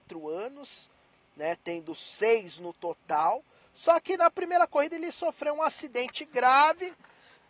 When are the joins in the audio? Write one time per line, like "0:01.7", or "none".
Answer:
none